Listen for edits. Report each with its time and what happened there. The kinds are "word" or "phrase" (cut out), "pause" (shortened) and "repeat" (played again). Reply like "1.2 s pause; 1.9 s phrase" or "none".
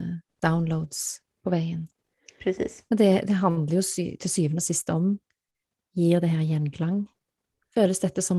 none